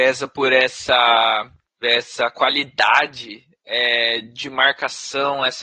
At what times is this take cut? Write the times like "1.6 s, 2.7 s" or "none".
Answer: 1.8 s